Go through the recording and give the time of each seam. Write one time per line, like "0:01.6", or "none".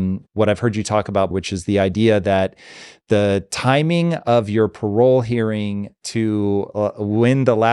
0:01.3